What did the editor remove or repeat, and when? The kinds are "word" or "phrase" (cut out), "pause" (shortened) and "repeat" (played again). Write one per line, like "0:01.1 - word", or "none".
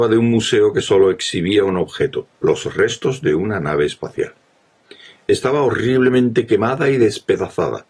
0:02.3 - pause